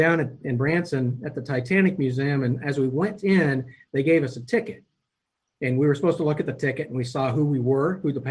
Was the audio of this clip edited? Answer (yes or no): no